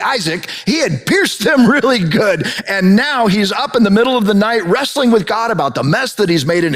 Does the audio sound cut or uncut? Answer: uncut